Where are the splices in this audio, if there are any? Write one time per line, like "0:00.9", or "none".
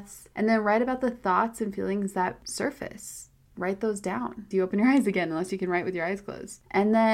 0:04.5